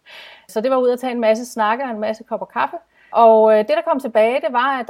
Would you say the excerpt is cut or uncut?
uncut